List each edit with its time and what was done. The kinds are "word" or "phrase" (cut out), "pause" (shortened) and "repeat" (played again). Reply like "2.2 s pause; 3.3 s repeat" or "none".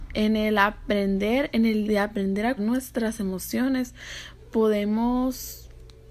1.8 s word; 2.6 s word